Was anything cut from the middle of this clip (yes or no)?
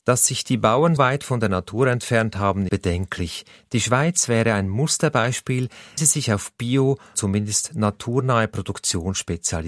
yes